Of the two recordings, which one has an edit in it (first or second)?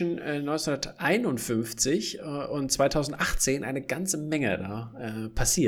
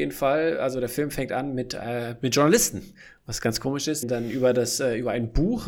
second